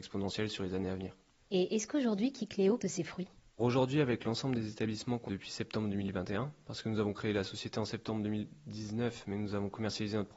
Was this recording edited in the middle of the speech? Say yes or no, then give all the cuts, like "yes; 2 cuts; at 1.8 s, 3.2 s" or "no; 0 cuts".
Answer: yes; 3 cuts; at 2.8 s, 3.6 s, 5.3 s